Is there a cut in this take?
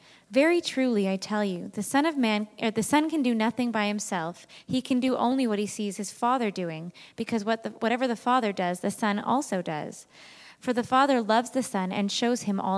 no; 0 cuts

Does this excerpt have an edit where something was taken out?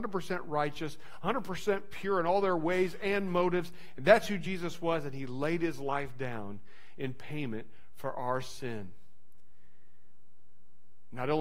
no; 0 cuts

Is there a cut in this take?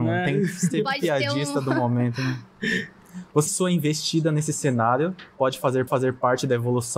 yes; 2 cuts; at 3.5 s, 5.9 s

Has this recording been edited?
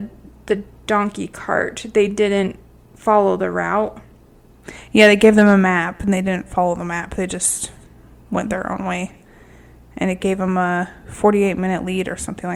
no; 0 cuts

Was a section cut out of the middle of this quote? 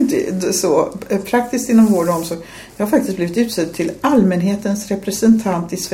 no; 0 cuts

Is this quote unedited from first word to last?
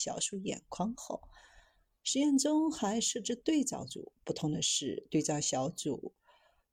yes; 0 cuts

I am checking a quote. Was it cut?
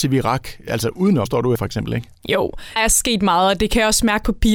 yes; 3 cuts; at 1.3 s, 1.6 s, 2.8 s

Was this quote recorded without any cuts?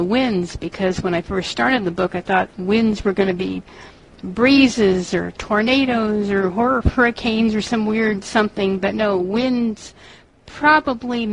yes; 0 cuts

